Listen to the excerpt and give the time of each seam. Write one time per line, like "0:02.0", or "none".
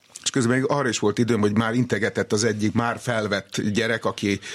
none